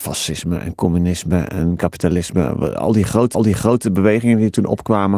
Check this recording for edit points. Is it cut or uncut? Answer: cut